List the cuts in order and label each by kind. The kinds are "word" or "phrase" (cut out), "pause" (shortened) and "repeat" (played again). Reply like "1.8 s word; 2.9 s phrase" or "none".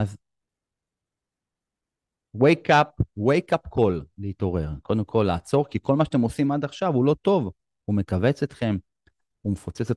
none